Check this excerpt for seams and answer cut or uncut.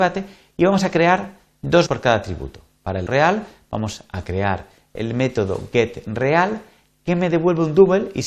cut